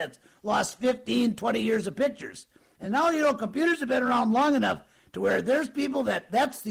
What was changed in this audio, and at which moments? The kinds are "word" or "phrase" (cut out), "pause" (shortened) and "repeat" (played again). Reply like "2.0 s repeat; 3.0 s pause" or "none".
none